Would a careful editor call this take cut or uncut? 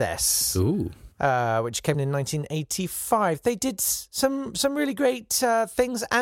cut